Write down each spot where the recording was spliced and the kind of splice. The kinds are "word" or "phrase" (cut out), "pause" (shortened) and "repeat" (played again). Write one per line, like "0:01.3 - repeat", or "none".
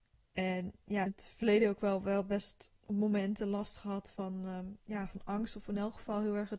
0:01.1 - phrase
0:02.8 - pause
0:04.8 - pause

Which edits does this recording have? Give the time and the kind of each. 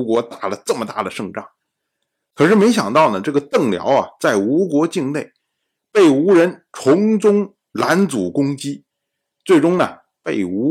none

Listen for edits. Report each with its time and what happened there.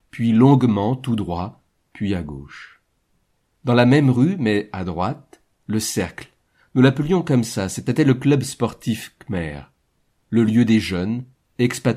none

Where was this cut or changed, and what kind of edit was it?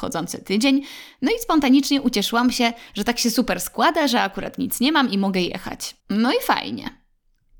0:06.0 - pause

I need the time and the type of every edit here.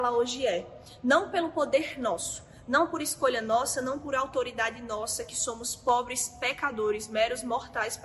none

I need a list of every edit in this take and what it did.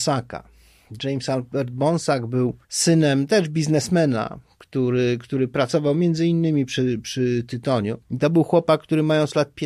0:02.6 - pause
0:08.0 - pause

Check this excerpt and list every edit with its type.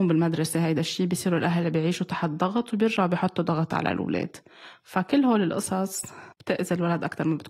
0:06.3 - pause

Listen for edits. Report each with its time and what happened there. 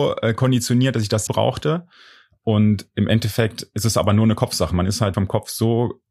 0:01.3 - phrase
0:05.1 - word

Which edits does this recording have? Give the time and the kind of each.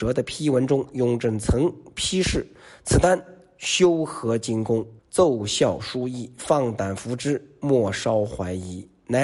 0:05.0 - pause

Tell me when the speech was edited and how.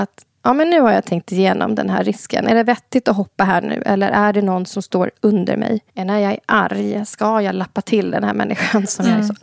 0:05.9 - pause

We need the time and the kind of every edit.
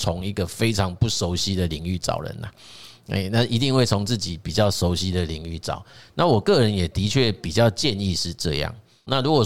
none

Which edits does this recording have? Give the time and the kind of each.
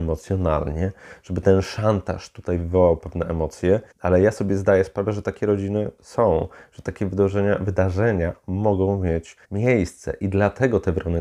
0:03.9 - pause
0:09.4 - pause

